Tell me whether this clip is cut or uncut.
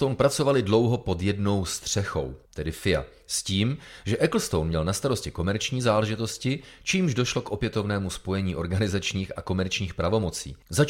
cut